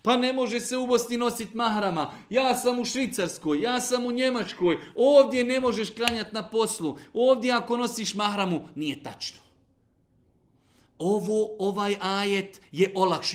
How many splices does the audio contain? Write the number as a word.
zero